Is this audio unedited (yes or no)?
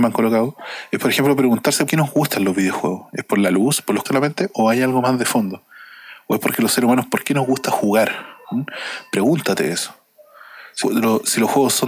no